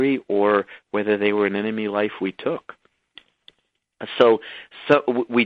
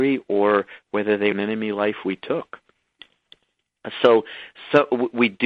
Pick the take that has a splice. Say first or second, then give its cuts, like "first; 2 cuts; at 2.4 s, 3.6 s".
second; 1 cut; at 1.3 s